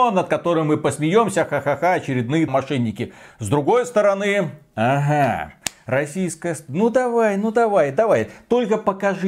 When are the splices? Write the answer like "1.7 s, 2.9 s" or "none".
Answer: 2.5 s

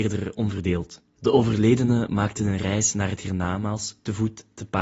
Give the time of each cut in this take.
none

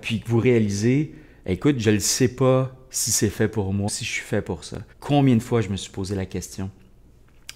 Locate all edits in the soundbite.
3.9 s, 4.9 s

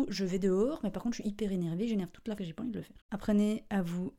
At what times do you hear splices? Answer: 2.4 s, 3.0 s

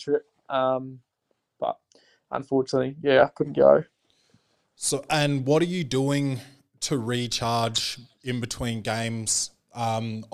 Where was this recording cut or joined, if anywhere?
none

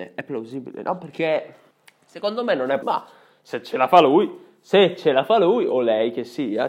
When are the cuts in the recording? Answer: 1.7 s, 2.8 s

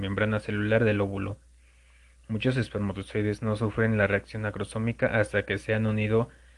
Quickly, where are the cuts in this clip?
none

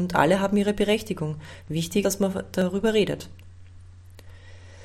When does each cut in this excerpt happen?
2.0 s

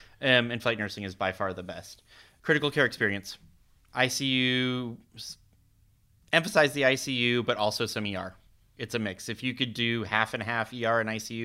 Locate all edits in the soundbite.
none

